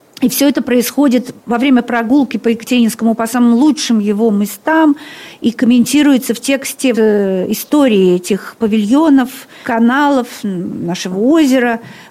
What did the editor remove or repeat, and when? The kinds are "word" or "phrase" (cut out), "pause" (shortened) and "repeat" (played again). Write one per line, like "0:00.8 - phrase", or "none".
0:01.4 - pause
0:03.2 - word
0:06.9 - word
0:09.6 - word